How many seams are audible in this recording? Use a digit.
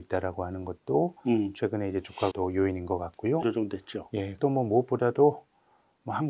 3